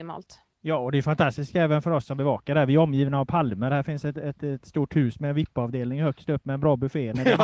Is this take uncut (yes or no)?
yes